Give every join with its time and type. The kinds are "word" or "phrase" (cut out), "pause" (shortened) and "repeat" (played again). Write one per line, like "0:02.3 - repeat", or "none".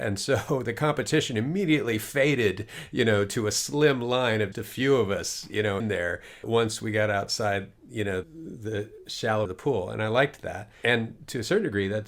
0:04.5 - word
0:05.8 - word
0:06.4 - word
0:08.2 - word
0:09.5 - word